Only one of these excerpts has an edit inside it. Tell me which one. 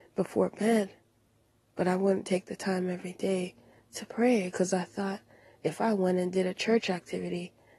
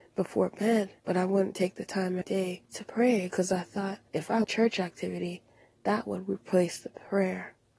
second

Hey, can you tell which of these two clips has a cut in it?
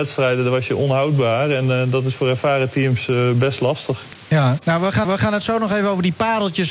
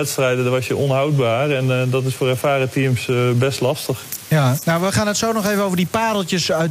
first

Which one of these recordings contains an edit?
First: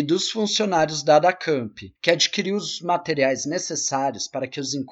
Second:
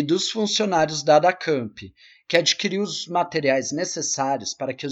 first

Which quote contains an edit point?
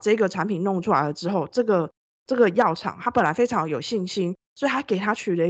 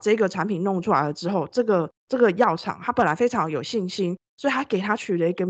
second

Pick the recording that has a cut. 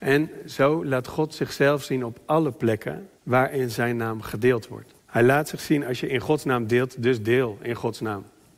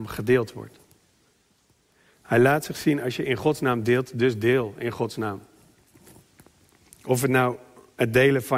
first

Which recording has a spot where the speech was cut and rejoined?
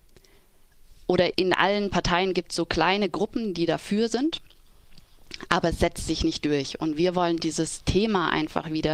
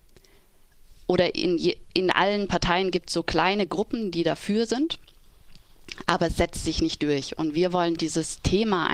first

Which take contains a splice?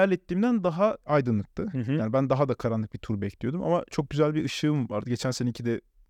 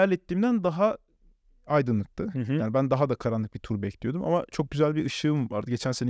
first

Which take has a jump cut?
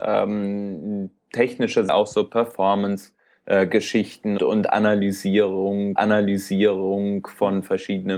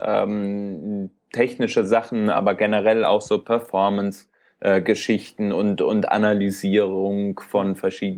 first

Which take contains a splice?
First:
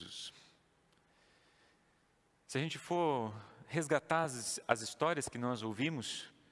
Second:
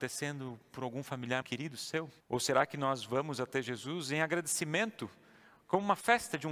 second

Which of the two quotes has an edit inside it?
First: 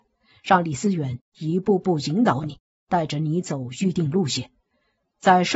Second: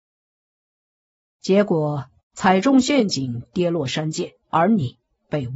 second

